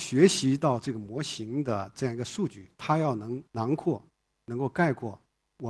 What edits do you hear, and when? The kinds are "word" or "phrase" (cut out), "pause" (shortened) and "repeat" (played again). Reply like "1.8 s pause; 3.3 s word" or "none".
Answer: 3.5 s pause